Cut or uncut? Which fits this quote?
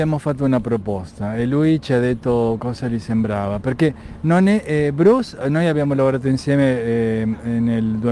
uncut